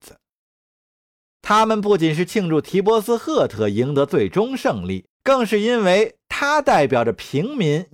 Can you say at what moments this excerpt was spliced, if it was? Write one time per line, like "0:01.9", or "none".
0:05.1